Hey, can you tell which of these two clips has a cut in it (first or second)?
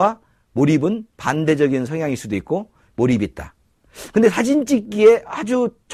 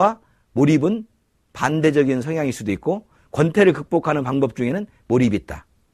first